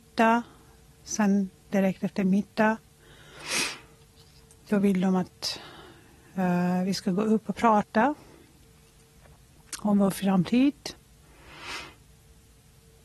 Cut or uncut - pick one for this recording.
uncut